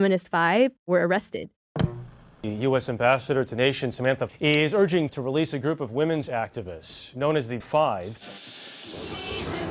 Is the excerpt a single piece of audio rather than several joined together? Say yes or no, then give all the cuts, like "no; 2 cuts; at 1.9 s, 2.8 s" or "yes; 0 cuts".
no; 5 cuts; at 3.5 s, 4.3 s, 5.1 s, 6.3 s, 7.6 s